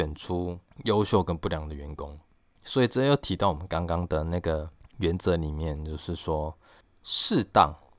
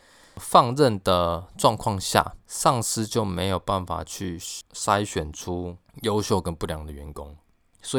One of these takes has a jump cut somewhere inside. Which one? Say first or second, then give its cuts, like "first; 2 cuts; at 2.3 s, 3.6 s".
second; 1 cut; at 2.4 s